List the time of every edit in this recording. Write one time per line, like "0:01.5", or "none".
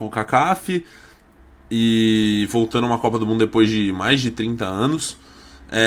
none